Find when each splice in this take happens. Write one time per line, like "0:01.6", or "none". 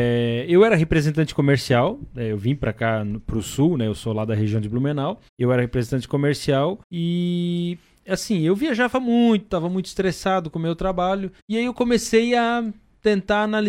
0:05.3
0:06.8
0:11.4